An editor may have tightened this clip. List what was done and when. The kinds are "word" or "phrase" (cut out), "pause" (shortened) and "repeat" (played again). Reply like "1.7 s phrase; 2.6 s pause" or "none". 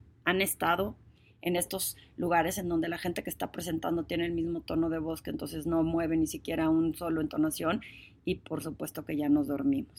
none